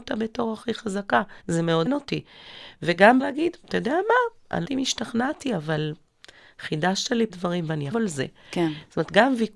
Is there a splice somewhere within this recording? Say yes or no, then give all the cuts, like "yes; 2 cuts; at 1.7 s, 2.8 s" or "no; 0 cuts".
yes; 6 cuts; at 1.4 s, 1.9 s, 3.2 s, 4.6 s, 7.3 s, 7.9 s